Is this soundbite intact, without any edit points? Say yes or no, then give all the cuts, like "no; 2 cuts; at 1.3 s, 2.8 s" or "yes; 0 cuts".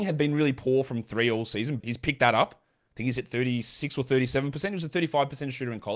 no; 1 cut; at 1.8 s